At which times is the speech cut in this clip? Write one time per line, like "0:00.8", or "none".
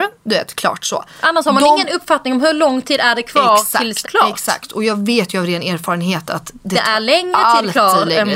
0:04.0